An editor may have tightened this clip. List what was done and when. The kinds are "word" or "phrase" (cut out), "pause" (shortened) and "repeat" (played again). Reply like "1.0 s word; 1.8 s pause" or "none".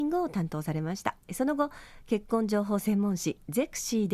1.2 s pause